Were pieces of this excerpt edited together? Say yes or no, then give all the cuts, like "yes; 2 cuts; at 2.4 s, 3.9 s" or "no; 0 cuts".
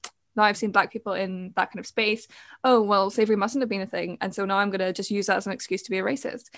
no; 0 cuts